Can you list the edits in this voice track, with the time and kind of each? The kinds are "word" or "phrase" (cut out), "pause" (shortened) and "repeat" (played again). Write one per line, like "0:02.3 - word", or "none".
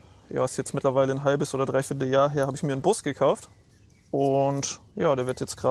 none